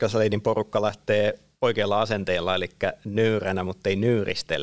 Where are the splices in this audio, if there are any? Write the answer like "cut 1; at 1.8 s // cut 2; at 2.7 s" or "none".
none